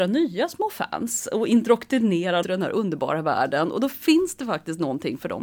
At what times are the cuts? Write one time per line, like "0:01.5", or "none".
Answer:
0:02.4